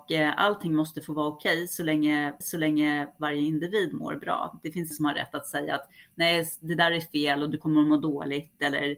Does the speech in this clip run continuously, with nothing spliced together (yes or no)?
no